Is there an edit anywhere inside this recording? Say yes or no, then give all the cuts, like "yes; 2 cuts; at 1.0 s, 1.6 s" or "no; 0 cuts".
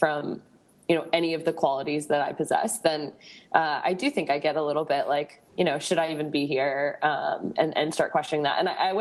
yes; 1 cut; at 5.5 s